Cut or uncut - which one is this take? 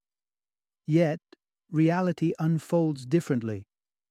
uncut